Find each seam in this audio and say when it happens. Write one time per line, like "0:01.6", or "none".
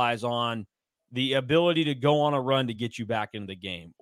none